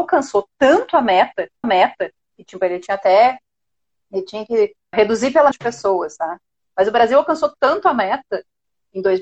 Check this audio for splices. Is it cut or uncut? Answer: cut